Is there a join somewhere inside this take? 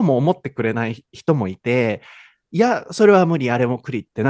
no; 0 cuts

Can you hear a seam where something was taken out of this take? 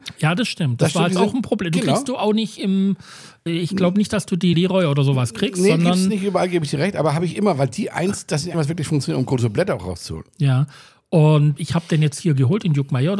yes; 4 cuts; at 3.5 s, 4.5 s, 8.5 s, 11.6 s

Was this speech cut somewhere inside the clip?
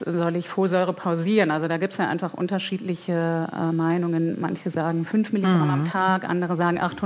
no; 0 cuts

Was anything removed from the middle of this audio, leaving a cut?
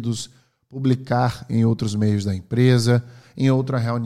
no; 0 cuts

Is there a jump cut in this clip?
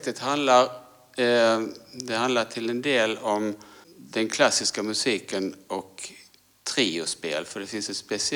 no; 0 cuts

